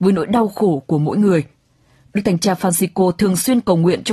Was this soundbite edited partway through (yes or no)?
no